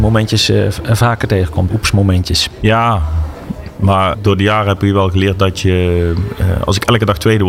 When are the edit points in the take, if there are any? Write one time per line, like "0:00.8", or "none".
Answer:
0:01.7
0:04.1